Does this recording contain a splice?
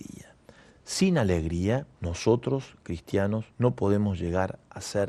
yes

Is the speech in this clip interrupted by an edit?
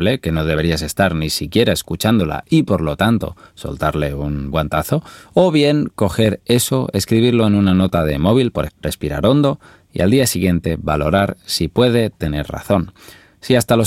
yes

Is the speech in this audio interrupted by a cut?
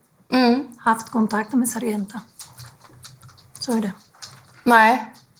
no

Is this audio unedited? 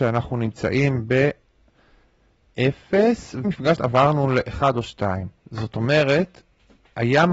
no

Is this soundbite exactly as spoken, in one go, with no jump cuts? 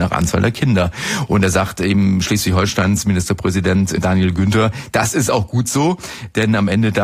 yes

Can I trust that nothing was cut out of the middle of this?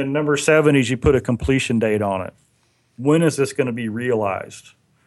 yes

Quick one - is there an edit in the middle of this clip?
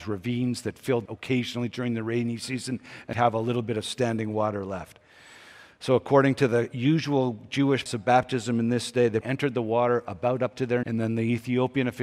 yes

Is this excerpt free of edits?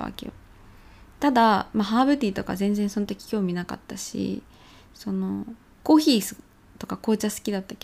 yes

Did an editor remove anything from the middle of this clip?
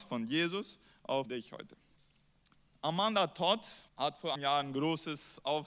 yes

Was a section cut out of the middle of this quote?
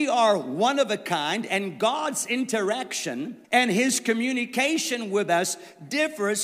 yes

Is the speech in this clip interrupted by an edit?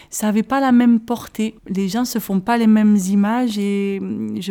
yes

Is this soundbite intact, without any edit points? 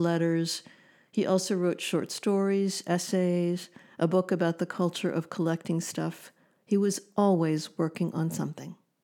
yes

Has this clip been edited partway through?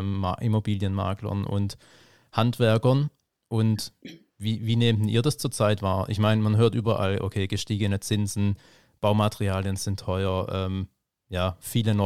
no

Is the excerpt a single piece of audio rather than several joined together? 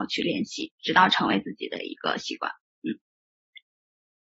yes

